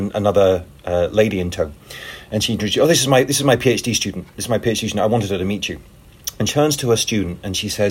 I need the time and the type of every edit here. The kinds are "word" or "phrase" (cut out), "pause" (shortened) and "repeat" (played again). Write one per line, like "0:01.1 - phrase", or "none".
0:06.5 - word